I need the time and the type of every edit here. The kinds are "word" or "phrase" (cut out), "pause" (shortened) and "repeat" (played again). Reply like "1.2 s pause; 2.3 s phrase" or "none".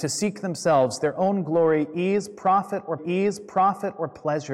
3.0 s repeat

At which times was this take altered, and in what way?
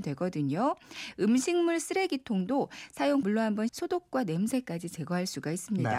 3.2 s word; 3.7 s phrase

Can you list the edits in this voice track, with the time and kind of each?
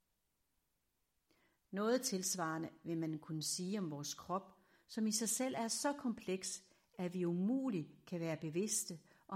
none

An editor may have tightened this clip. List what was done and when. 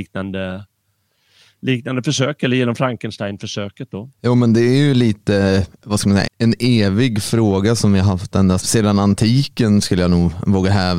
4.1 s pause; 6.3 s word; 8.6 s word

